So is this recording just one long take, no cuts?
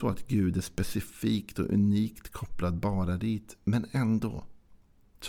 yes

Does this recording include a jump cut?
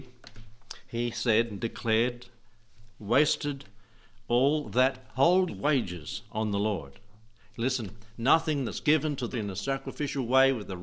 yes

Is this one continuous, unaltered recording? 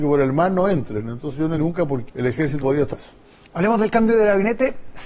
no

